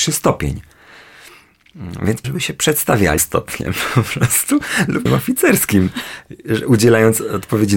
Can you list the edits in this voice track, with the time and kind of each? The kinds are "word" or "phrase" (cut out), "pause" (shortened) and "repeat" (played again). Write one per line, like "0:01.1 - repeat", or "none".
0:02.2 - word
0:03.2 - word
0:05.1 - word